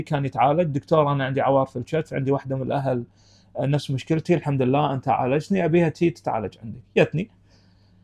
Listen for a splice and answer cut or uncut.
uncut